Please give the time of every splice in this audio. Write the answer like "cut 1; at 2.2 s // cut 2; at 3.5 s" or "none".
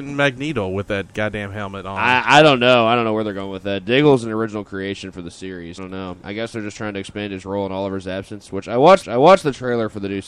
cut 1; at 5.8 s // cut 2; at 9.0 s